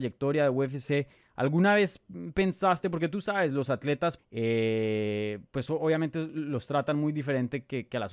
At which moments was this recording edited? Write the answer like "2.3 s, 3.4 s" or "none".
4.2 s